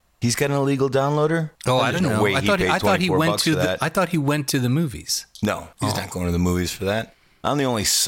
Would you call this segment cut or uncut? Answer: cut